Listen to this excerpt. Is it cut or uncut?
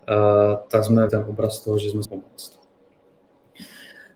cut